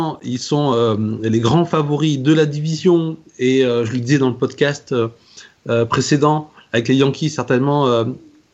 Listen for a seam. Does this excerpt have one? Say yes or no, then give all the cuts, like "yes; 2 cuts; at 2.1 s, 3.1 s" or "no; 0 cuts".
no; 0 cuts